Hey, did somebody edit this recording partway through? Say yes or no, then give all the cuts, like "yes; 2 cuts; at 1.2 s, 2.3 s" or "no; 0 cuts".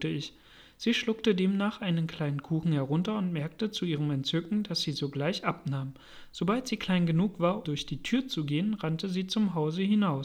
yes; 1 cut; at 7.6 s